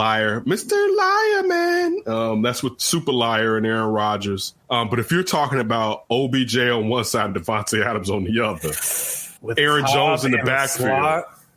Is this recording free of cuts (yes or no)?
no